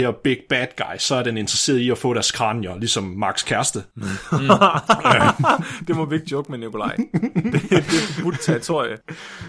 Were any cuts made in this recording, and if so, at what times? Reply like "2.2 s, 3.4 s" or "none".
3.9 s